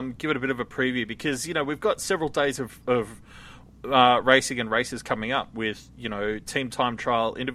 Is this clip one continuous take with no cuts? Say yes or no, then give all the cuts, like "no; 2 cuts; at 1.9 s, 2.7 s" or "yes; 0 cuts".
yes; 0 cuts